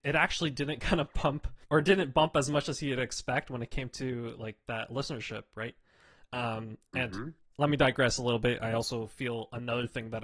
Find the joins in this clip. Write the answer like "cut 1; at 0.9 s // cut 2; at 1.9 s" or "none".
cut 1; at 1.6 s